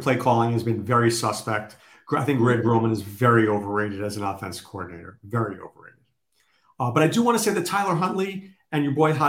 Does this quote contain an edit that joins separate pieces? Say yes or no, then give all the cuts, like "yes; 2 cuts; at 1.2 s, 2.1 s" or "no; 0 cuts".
no; 0 cuts